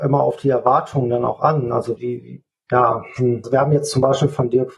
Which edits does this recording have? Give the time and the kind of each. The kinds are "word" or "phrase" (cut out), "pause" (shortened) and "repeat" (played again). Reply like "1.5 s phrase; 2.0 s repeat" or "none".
2.0 s word; 3.4 s word